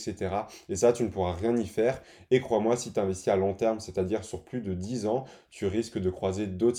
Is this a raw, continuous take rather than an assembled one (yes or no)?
yes